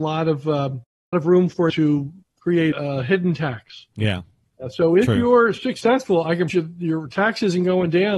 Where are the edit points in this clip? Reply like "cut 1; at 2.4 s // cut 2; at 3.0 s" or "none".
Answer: cut 1; at 1.1 s // cut 2; at 1.7 s // cut 3; at 2.7 s // cut 4; at 6.5 s